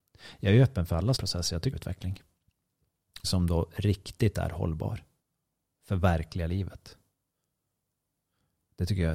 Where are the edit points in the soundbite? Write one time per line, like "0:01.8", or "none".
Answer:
0:01.2
0:01.7
0:03.2